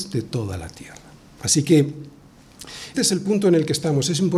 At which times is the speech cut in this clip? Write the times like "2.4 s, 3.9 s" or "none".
2.9 s